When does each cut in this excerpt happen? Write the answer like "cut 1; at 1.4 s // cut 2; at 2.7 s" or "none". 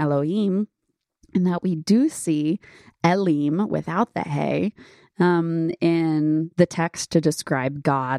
none